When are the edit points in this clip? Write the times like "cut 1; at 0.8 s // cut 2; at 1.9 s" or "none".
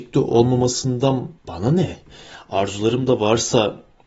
cut 1; at 1.4 s

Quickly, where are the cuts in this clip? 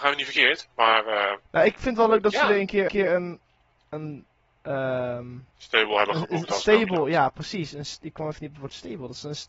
cut 1; at 1.4 s // cut 2; at 2.9 s // cut 3; at 5.5 s

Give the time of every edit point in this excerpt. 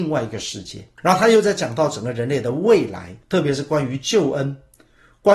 cut 1; at 1.0 s // cut 2; at 3.2 s

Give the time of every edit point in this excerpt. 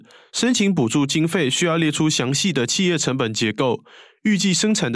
none

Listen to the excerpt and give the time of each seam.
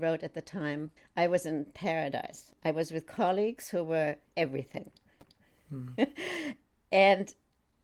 cut 1; at 1.0 s // cut 2; at 4.3 s

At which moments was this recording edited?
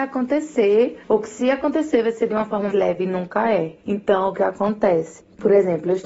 cut 1; at 2.7 s

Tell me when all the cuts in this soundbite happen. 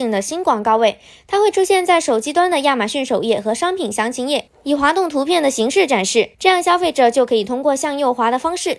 cut 1; at 6.3 s

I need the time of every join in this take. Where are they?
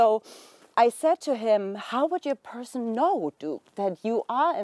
none

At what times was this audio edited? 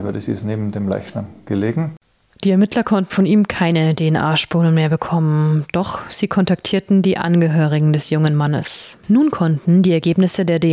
cut 1; at 3.1 s

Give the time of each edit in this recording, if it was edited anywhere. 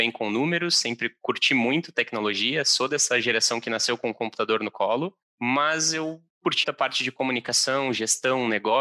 cut 1; at 6.6 s

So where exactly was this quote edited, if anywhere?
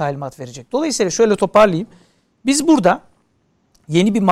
none

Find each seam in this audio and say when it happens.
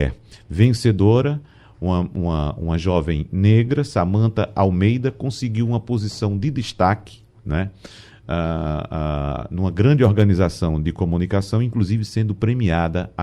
none

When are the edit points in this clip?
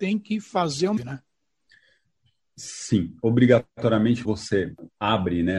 cut 1; at 1.0 s // cut 2; at 4.2 s

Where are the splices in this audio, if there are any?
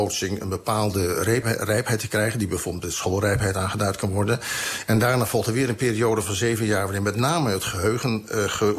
cut 1; at 1.4 s

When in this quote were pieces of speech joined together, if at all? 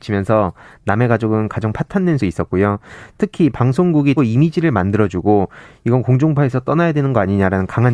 cut 1; at 2.2 s // cut 2; at 4.2 s

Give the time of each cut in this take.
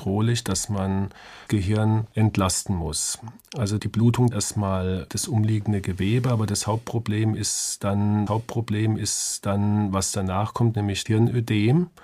cut 1; at 1.5 s // cut 2; at 2.1 s // cut 3; at 3.8 s // cut 4; at 4.3 s // cut 5; at 5.1 s // cut 6; at 8.3 s // cut 7; at 11.1 s

